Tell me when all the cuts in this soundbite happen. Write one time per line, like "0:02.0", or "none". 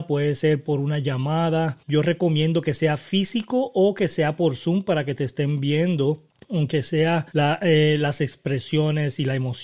0:01.8
0:06.3
0:07.3